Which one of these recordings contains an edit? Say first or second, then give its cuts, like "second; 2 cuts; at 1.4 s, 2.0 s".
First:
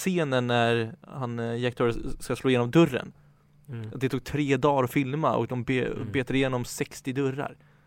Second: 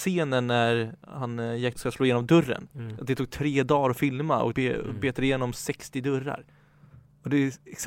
second; 3 cuts; at 1.7 s, 2.7 s, 4.5 s